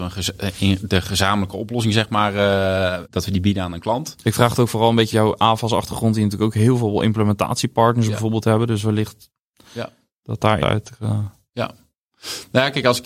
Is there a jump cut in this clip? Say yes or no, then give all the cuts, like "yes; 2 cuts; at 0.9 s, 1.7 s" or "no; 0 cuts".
yes; 3 cuts; at 3.0 s, 5.1 s, 10.6 s